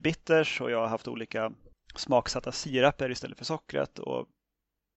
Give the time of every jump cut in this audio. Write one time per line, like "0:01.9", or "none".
0:01.7

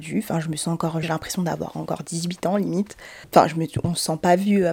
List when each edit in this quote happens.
0:01.0
0:03.2

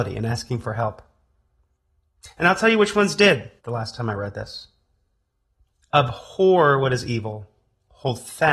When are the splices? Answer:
0:03.6

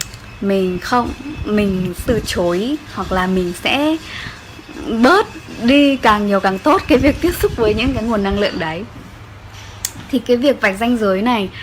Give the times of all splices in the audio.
0:02.1

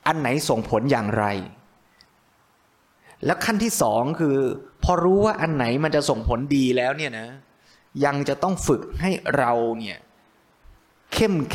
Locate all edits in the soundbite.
none

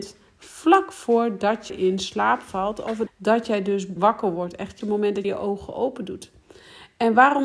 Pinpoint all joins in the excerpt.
0:01.7
0:03.1
0:04.0
0:04.8
0:05.2

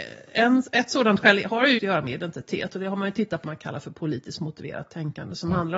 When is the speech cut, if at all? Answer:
0:01.8
0:03.4

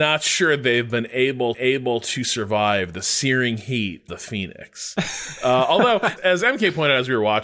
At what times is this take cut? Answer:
0:01.5
0:04.1
0:06.2

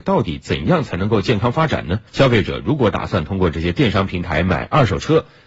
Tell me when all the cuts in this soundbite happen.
0:02.1

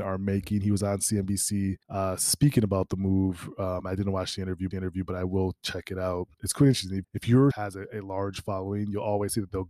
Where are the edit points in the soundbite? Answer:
0:01.8
0:04.7
0:06.3
0:07.0
0:07.5

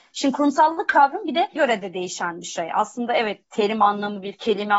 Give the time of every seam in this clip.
0:01.6
0:03.4

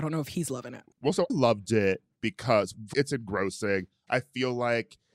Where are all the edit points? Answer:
0:00.9
0:01.3
0:02.9

